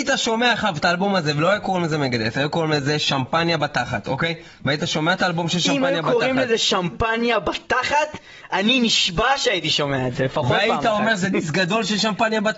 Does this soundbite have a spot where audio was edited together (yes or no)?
no